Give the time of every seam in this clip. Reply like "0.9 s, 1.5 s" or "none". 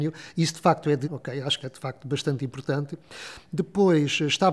1.0 s, 1.6 s